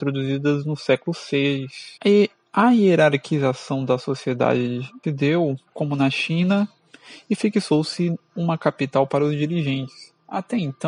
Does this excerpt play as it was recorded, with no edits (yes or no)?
no